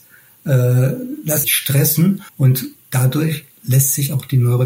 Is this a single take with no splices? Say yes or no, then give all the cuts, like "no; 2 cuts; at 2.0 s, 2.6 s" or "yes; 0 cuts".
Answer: no; 2 cuts; at 1.4 s, 2.3 s